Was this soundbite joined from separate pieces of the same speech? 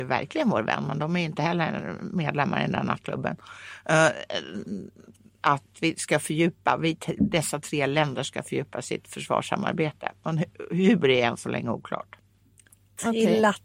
no; 0 cuts

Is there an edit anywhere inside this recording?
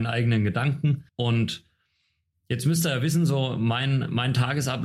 yes; 1 cut; at 1.1 s

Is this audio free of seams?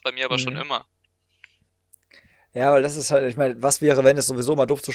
yes; 0 cuts

